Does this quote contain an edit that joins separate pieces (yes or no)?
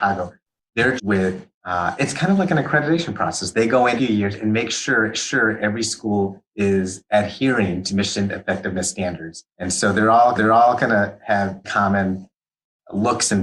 yes